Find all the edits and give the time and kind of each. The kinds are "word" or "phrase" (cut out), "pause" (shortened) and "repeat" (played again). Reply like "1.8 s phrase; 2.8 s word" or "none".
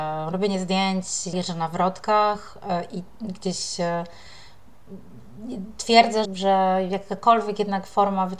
1.3 s word; 6.2 s word